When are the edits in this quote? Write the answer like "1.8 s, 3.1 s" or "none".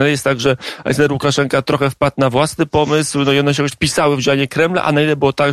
3.7 s